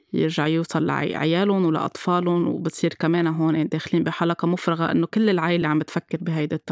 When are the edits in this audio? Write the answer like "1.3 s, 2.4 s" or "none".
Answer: none